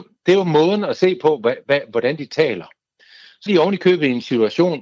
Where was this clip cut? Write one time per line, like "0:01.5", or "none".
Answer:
0:03.5

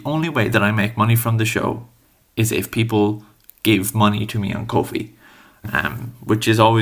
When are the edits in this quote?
none

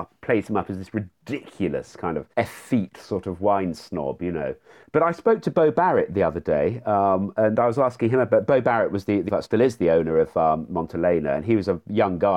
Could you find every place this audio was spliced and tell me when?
0:02.3
0:09.3

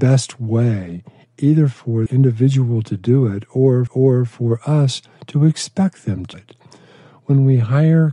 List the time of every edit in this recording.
0:02.1
0:03.9
0:06.3

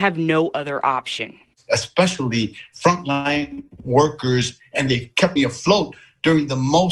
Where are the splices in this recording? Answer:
0:01.5
0:05.4

